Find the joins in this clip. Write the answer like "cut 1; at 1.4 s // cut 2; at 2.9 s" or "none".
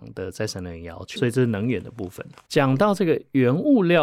cut 1; at 1.2 s